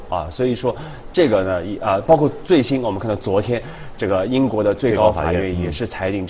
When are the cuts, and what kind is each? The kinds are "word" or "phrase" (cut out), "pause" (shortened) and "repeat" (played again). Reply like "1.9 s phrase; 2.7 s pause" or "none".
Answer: none